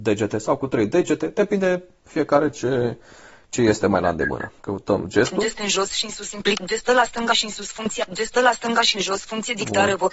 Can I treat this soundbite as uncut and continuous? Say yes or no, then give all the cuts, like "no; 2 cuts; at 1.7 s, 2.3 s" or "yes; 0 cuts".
yes; 0 cuts